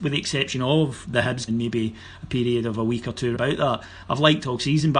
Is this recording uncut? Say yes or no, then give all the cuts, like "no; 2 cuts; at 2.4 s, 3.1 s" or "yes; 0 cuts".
no; 3 cuts; at 1.0 s, 1.5 s, 3.3 s